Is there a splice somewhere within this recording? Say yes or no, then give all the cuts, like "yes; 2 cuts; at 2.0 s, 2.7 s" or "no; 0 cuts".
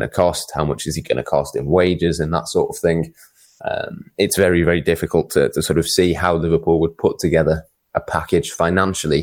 no; 0 cuts